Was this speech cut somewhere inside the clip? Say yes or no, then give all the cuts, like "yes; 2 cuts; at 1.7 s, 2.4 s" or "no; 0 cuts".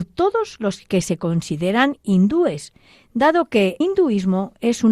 yes; 1 cut; at 3.8 s